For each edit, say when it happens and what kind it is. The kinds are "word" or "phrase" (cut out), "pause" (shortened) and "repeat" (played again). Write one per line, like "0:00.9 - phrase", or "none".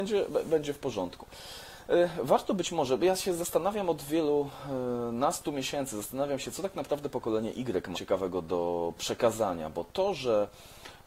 0:07.9 - word